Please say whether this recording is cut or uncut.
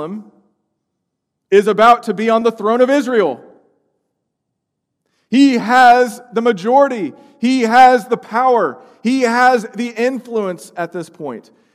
uncut